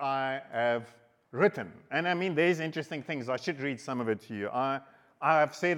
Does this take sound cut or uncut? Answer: uncut